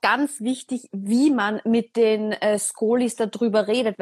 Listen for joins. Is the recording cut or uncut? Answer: uncut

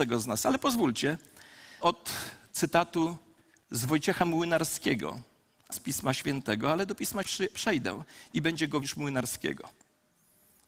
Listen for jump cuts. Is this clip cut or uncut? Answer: cut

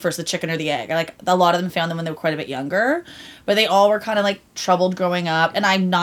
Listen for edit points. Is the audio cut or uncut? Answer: uncut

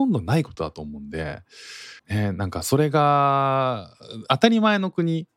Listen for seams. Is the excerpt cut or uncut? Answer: cut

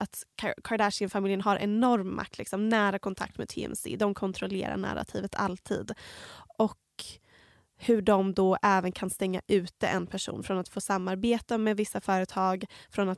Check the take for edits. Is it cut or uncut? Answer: uncut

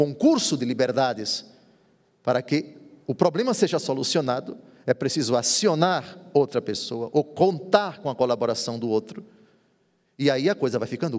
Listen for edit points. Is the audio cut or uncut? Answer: uncut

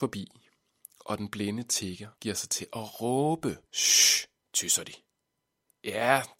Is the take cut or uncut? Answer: cut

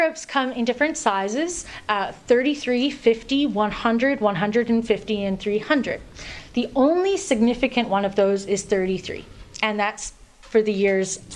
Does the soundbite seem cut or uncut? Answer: uncut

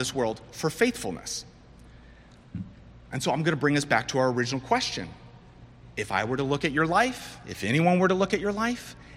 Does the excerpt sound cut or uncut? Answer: uncut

